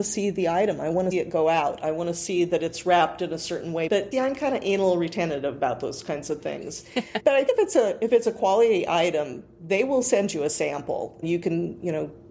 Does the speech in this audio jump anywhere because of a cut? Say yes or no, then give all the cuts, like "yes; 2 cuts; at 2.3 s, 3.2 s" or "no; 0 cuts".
yes; 4 cuts; at 1.1 s, 4.1 s, 7.5 s, 11.2 s